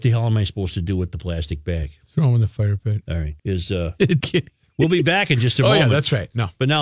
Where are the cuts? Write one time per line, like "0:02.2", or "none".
0:03.4
0:04.2